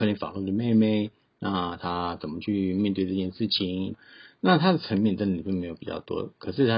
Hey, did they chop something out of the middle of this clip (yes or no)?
no